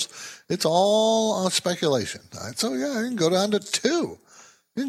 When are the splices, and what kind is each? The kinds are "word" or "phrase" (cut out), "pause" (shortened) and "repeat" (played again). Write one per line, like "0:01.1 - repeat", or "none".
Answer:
none